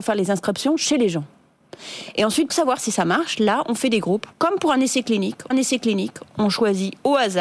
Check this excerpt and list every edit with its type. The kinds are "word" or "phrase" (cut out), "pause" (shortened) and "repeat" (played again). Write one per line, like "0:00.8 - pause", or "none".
0:02.5 - word
0:04.3 - pause
0:05.5 - repeat